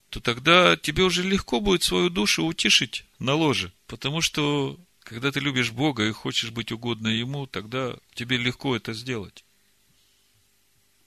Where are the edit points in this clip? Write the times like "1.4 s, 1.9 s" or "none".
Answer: 3.8 s, 4.9 s, 8.0 s